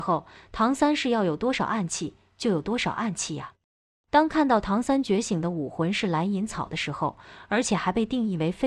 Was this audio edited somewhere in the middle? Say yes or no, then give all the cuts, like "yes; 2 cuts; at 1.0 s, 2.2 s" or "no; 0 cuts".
no; 0 cuts